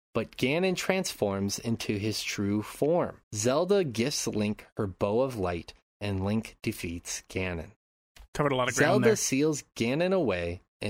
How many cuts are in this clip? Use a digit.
1